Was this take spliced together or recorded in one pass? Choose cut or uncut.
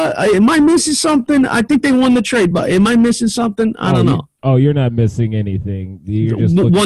uncut